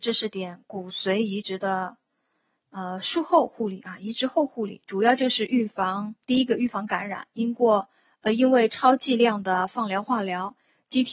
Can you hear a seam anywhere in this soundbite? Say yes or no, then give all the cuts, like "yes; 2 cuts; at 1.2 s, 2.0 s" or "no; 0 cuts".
yes; 1 cut; at 6.2 s